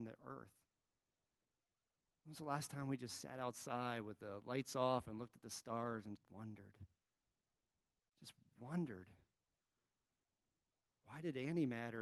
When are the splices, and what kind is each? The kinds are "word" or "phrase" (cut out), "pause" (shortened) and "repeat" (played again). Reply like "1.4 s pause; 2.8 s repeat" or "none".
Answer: 6.2 s word